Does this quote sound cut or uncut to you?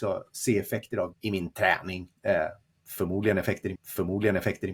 cut